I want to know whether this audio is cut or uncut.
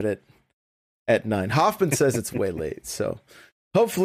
uncut